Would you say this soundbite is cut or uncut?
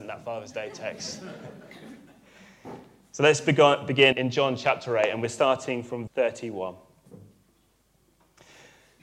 cut